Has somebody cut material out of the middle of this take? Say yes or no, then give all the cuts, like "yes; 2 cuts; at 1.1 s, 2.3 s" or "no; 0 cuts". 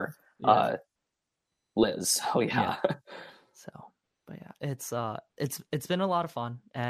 no; 0 cuts